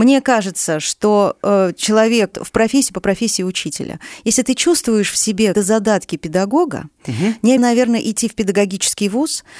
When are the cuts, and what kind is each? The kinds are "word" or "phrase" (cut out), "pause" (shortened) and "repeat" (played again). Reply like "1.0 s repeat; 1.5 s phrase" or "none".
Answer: 2.3 s word; 5.5 s word; 7.0 s pause; 7.6 s word